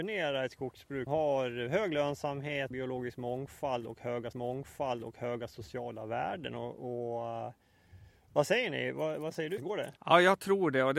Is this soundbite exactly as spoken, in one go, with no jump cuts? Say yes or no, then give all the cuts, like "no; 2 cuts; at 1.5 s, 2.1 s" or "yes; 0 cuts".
no; 5 cuts; at 1.1 s, 2.7 s, 4.3 s, 9.6 s, 10.0 s